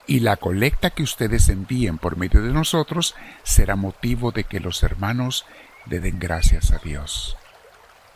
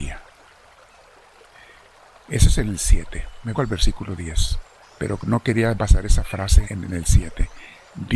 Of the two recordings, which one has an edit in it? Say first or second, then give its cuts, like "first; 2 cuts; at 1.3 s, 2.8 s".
second; 4 cuts; at 3.5 s, 4.8 s, 5.8 s, 6.6 s